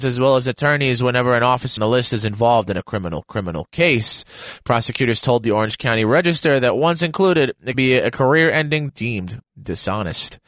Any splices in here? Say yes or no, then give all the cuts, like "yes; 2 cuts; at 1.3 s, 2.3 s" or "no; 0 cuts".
yes; 4 cuts; at 1.8 s, 3.3 s, 7.7 s, 8.9 s